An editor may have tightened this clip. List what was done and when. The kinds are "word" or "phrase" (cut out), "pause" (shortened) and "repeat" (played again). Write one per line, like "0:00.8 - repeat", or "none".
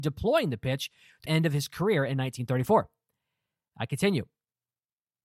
0:01.2 - word